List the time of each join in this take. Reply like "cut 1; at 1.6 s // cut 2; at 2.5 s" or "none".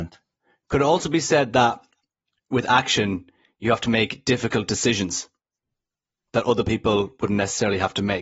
none